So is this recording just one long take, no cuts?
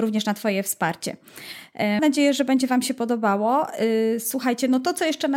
no; 1 cut; at 2.0 s

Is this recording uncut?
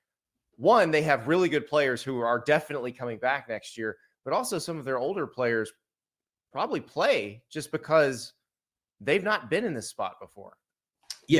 yes; 0 cuts

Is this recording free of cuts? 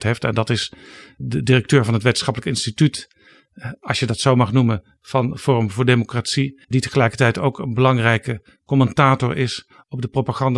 no; 1 cut; at 6.6 s

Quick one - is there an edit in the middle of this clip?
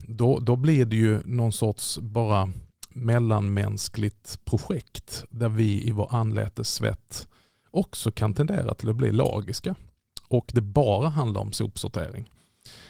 no; 0 cuts

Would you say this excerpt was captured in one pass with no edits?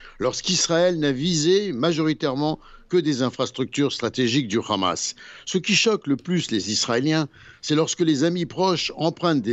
yes; 0 cuts

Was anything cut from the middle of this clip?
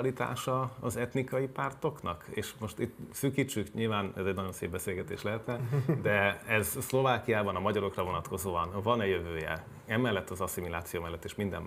no; 0 cuts

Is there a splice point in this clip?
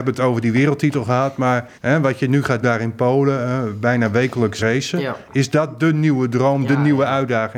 yes; 3 cuts; at 1.8 s, 2.6 s, 4.6 s

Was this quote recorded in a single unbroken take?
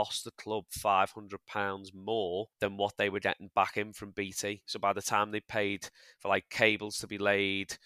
no; 1 cut; at 2.5 s

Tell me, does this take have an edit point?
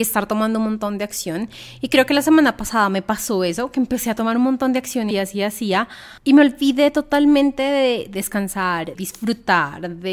yes; 3 cuts; at 5.1 s, 6.2 s, 8.9 s

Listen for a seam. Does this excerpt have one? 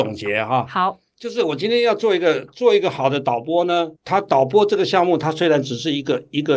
yes; 1 cut; at 3.9 s

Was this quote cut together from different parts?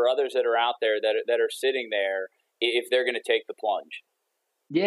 no; 0 cuts

